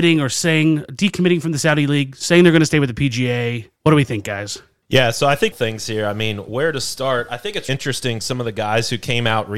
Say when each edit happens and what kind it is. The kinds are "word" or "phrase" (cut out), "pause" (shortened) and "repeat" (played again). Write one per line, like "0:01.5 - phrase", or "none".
0:03.8 - pause
0:05.5 - phrase
0:07.7 - word